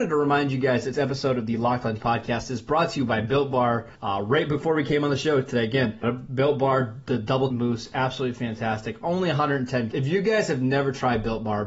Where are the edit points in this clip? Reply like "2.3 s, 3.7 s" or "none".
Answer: 0.9 s, 2.0 s, 4.0 s, 6.0 s, 7.5 s, 9.9 s